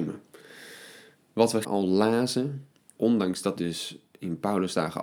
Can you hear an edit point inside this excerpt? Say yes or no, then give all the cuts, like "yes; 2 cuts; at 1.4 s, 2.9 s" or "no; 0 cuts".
yes; 3 cuts; at 1.6 s, 3.0 s, 3.6 s